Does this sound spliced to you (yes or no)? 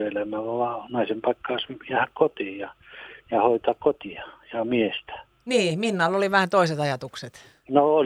no